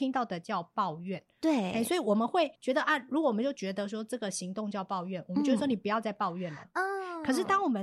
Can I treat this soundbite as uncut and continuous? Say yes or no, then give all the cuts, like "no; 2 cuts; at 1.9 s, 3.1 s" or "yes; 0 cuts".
no; 1 cut; at 2.5 s